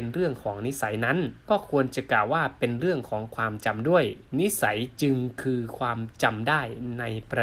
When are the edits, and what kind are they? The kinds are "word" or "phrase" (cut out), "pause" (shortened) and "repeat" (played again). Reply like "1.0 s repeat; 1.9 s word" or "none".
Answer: 1.4 s pause; 4.3 s pause